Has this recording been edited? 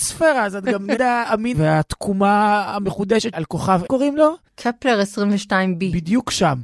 yes; 4 cuts; at 1.0 s, 1.5 s, 3.3 s, 3.9 s

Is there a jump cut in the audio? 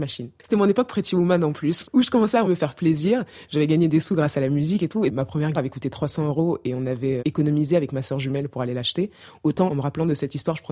yes; 4 cuts; at 2.4 s, 5.5 s, 7.2 s, 9.7 s

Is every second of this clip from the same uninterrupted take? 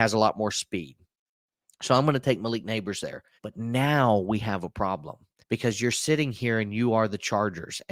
no; 2 cuts; at 3.4 s, 5.4 s

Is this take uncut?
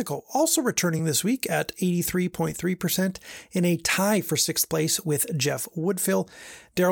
yes; 0 cuts

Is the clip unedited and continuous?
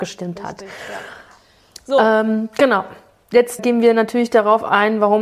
no; 1 cut; at 3.6 s

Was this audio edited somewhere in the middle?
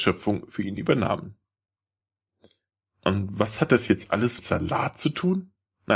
yes; 1 cut; at 4.4 s

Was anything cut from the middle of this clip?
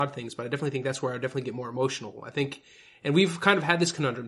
no; 0 cuts

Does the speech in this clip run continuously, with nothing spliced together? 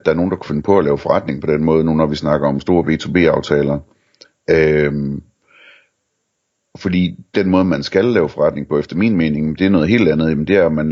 yes; 0 cuts

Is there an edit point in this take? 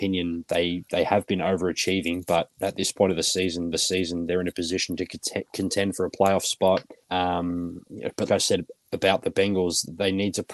yes; 3 cuts; at 3.7 s, 7.0 s, 8.3 s

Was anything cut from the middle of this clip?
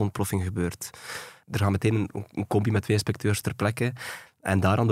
no; 0 cuts

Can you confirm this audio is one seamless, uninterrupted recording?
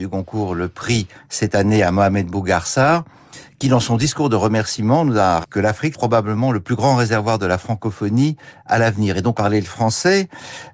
no; 3 cuts; at 5.4 s, 5.9 s, 9.3 s

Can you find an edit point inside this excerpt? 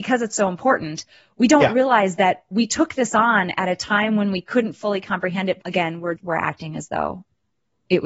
yes; 2 cuts; at 5.6 s, 6.2 s

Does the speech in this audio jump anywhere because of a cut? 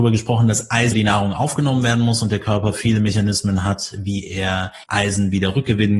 yes; 2 cuts; at 0.9 s, 4.8 s

